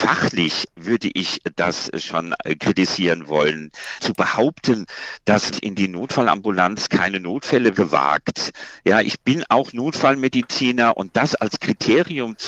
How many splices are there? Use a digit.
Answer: 4